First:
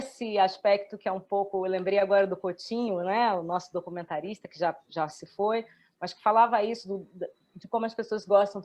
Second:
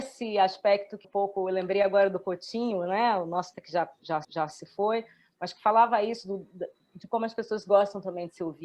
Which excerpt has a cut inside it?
second; 3 cuts; at 1.0 s, 3.5 s, 4.2 s

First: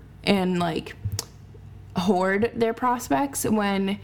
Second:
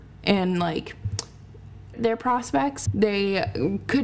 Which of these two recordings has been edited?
second; 2 cuts; at 1.9 s, 2.9 s

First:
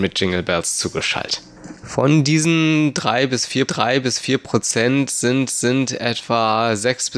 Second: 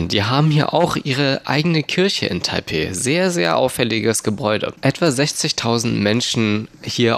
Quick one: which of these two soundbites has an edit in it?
first; 2 cuts; at 3.7 s, 5.5 s

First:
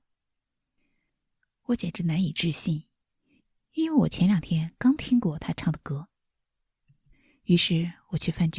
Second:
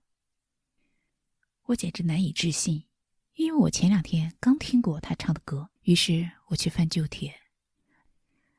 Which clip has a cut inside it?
second; 2 cuts; at 3.1 s, 5.8 s

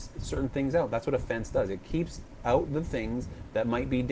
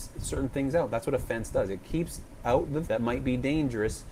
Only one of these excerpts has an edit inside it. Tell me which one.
second; 1 cut; at 2.8 s

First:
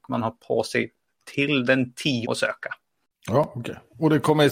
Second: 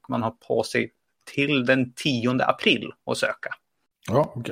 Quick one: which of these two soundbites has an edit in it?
first; 1 cut; at 2.2 s

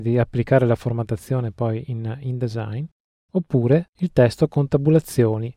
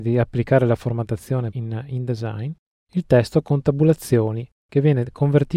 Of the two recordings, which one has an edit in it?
second; 2 cuts; at 1.5 s, 2.9 s

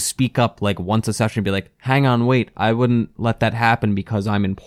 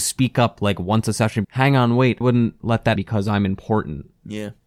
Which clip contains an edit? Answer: second; 3 cuts; at 1.4 s, 2.2 s, 3.0 s

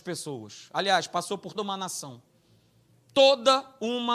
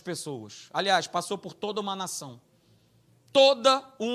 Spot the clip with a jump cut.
first; 1 cut; at 1.5 s

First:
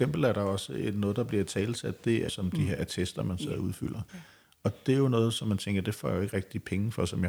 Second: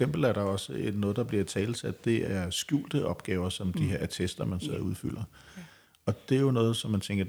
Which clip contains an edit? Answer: first; 2 cuts; at 2.3 s, 4.1 s

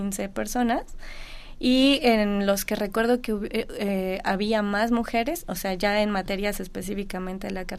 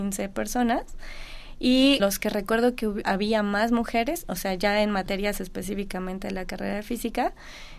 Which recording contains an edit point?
second; 2 cuts; at 2.0 s, 3.0 s

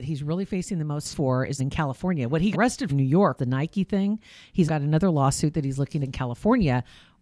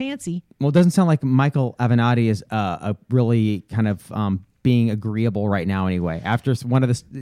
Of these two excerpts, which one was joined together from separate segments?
first; 7 cuts; at 1.1 s, 1.6 s, 2.5 s, 2.9 s, 3.4 s, 4.7 s, 6.0 s

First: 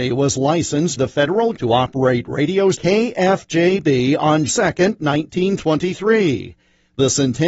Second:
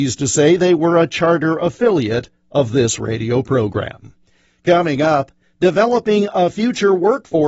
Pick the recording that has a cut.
first; 4 cuts; at 1.0 s, 1.5 s, 2.7 s, 4.5 s

